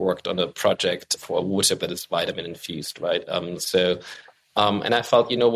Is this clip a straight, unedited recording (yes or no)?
no